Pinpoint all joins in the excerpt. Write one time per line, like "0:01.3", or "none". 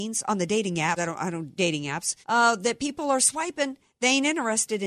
0:01.0
0:01.6
0:02.2